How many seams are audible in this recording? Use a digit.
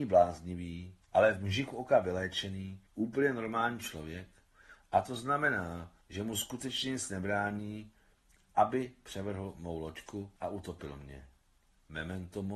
4